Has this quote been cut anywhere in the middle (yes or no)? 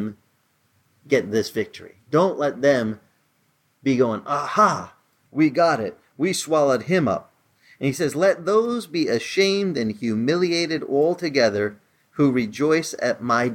no